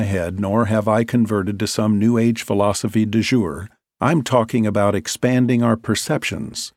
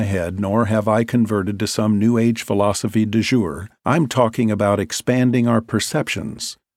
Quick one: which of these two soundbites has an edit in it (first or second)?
second